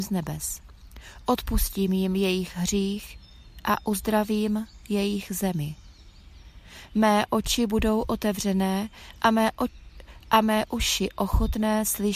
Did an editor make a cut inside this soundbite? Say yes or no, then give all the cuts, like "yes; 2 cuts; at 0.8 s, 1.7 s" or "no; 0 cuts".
no; 0 cuts